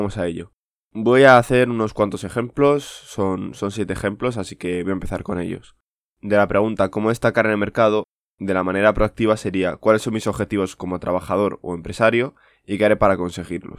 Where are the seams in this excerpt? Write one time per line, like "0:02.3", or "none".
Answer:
none